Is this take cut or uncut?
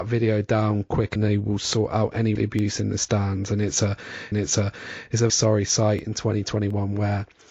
cut